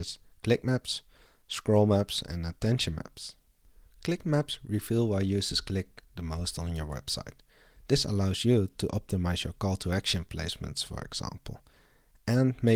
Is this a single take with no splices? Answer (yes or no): yes